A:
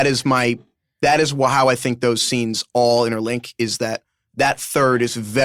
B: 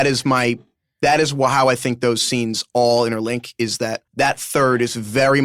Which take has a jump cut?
B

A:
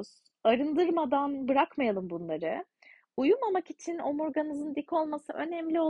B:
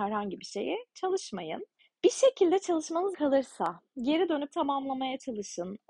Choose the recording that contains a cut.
B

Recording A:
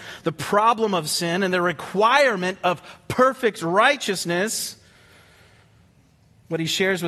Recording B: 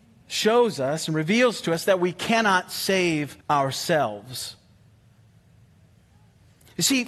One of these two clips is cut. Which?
B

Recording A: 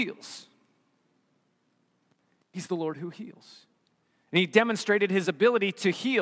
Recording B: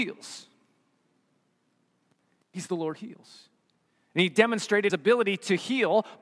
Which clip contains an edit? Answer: B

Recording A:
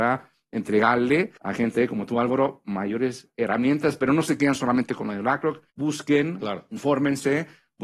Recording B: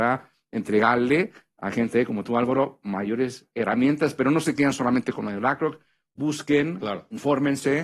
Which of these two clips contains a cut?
A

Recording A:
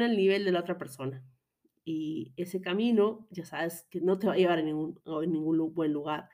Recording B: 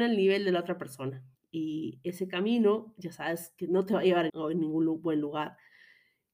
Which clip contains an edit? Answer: B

